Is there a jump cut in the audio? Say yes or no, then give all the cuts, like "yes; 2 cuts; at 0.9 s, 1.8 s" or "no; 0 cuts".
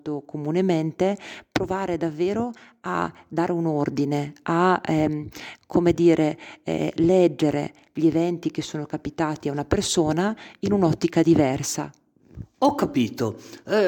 no; 0 cuts